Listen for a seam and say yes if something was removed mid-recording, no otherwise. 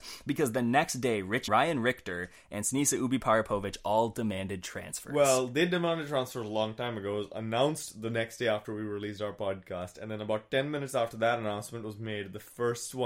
yes